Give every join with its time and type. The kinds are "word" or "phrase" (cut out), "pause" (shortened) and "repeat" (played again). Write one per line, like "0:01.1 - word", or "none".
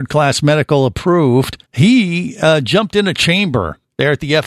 0:01.7 - pause